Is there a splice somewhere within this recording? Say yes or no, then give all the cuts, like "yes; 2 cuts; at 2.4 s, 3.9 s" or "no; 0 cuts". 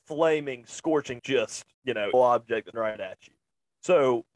yes; 4 cuts; at 1.2 s, 1.7 s, 2.1 s, 2.7 s